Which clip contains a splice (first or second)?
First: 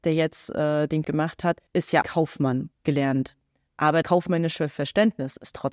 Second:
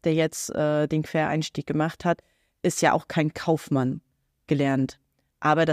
first